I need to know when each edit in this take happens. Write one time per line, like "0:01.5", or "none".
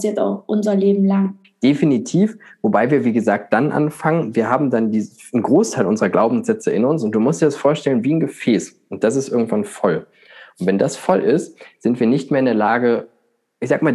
none